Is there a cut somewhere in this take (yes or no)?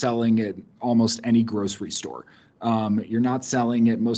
no